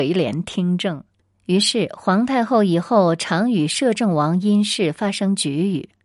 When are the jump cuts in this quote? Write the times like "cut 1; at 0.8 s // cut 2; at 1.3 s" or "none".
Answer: cut 1; at 1.2 s